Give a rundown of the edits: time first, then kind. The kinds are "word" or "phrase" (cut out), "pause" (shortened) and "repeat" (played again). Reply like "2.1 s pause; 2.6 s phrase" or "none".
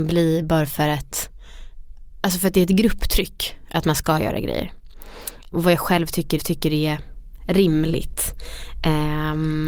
6.4 s repeat